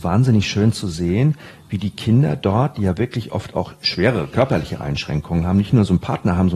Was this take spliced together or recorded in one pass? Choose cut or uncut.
uncut